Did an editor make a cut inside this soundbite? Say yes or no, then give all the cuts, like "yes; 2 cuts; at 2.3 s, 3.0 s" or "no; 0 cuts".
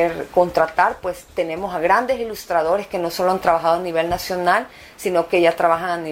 no; 0 cuts